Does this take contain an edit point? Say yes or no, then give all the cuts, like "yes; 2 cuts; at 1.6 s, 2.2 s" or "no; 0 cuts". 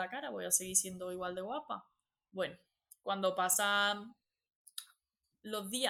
no; 0 cuts